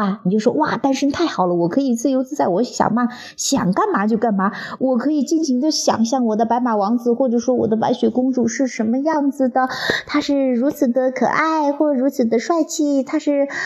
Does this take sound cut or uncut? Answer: uncut